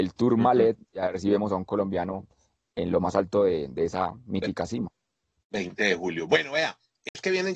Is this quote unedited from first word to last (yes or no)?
yes